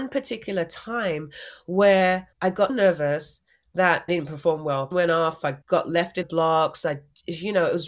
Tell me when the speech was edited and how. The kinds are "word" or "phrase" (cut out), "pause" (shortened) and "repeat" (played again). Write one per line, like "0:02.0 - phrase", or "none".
0:02.3 - pause
0:02.7 - word
0:04.1 - word
0:04.9 - word
0:05.6 - pause
0:06.2 - word